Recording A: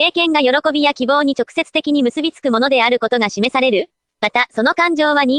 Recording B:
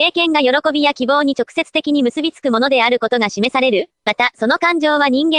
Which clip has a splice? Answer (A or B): B